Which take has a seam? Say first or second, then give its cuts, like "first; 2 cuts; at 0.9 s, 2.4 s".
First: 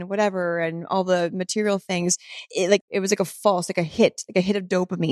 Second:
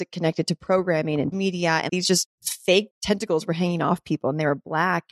second; 2 cuts; at 1.3 s, 1.9 s